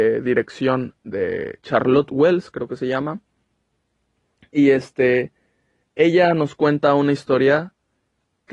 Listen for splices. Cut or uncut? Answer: uncut